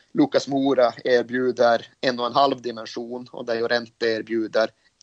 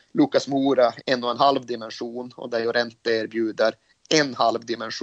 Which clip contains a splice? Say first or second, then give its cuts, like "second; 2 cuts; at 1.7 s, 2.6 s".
second; 1 cut; at 1.0 s